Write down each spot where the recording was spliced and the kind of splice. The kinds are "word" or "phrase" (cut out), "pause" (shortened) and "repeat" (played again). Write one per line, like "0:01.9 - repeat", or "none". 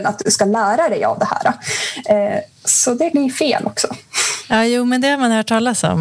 0:03.1 - word